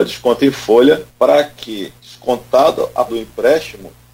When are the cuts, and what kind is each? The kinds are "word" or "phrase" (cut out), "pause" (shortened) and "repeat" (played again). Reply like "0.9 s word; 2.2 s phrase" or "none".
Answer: 1.1 s pause; 2.0 s pause; 3.1 s word